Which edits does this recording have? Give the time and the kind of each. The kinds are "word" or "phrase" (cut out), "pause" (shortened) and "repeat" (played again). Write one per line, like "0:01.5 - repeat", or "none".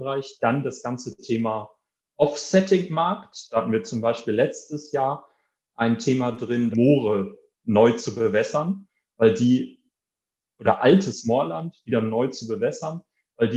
0:06.7 - phrase